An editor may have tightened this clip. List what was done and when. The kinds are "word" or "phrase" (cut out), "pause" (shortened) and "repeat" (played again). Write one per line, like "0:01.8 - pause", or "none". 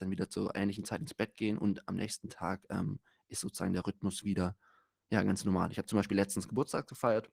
none